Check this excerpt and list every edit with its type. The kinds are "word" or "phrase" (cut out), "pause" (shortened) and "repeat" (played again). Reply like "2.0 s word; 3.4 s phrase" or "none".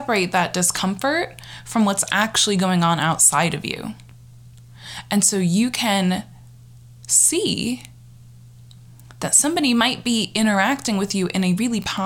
none